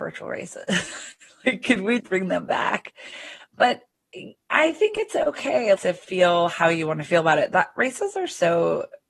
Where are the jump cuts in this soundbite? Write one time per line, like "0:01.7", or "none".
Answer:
0:02.0
0:05.8